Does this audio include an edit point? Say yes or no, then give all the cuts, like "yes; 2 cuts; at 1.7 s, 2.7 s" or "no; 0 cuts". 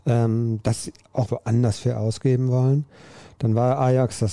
yes; 1 cut; at 1.2 s